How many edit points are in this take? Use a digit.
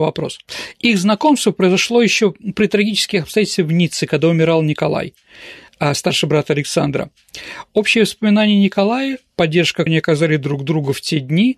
1